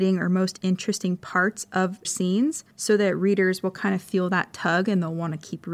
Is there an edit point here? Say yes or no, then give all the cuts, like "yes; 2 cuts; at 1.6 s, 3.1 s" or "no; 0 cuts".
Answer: yes; 2 cuts; at 2.0 s, 2.7 s